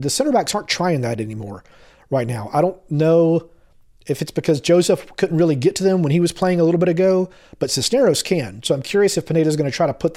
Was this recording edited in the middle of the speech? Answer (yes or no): no